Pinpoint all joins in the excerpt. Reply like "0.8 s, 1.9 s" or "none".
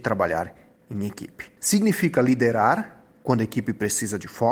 1.6 s